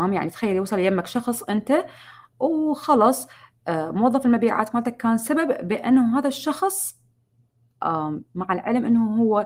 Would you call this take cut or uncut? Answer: uncut